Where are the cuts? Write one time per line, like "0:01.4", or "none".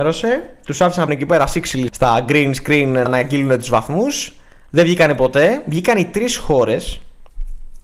0:01.1
0:01.9
0:03.1